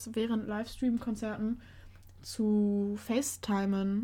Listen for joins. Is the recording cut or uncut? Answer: uncut